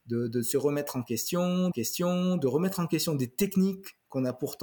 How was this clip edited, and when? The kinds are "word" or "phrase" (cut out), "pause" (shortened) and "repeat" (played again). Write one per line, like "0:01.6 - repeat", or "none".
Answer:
0:01.7 - repeat